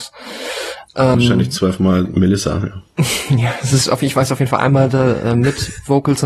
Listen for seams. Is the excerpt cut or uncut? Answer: cut